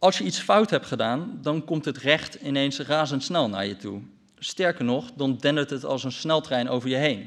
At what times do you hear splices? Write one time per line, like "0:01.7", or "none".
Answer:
none